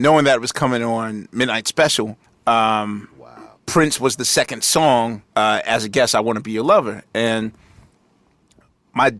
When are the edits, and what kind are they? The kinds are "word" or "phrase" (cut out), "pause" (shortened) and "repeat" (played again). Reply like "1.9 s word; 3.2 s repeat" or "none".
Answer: 2.3 s pause; 3.6 s pause; 5.3 s pause